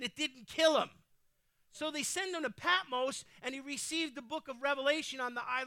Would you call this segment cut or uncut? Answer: uncut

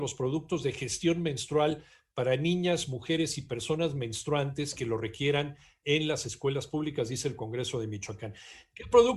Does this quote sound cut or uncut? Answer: uncut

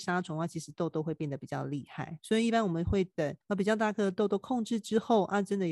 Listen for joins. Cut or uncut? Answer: cut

